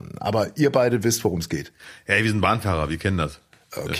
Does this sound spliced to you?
no; 0 cuts

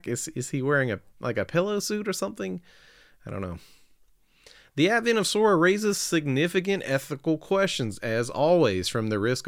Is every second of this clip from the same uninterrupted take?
yes; 0 cuts

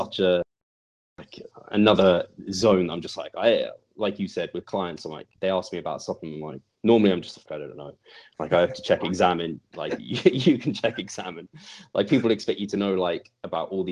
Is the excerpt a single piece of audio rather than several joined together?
no; 1 cut; at 7.5 s

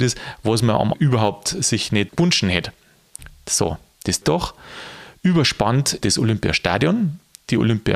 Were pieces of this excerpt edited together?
yes; 4 cuts; at 0.9 s, 2.1 s, 4.2 s, 6.0 s

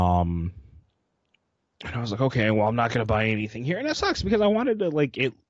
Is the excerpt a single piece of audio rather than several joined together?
yes; 0 cuts

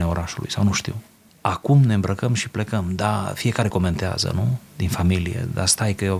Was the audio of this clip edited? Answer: no; 0 cuts

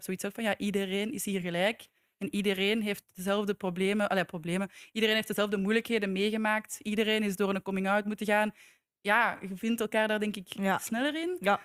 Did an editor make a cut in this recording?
no; 0 cuts

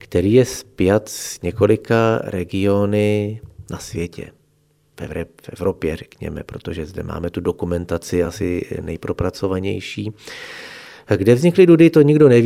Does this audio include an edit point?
no; 0 cuts

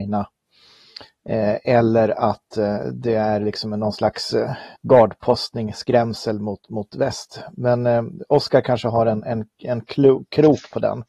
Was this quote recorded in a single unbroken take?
no; 1 cut; at 4.8 s

